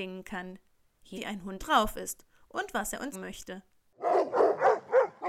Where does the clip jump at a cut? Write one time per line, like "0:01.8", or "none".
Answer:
0:01.1
0:01.6
0:03.1